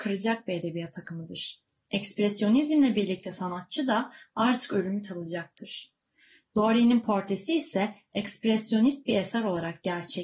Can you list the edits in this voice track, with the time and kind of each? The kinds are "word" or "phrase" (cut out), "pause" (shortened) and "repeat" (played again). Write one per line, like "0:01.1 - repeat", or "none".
none